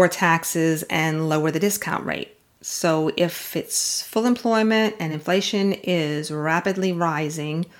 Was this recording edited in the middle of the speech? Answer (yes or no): no